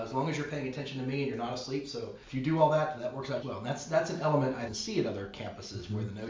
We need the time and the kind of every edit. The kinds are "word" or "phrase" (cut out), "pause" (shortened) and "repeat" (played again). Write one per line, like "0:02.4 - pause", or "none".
0:02.2 - pause
0:03.0 - word
0:03.4 - word
0:04.7 - phrase